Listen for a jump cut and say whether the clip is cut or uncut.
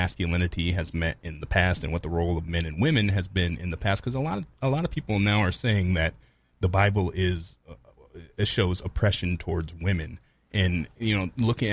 uncut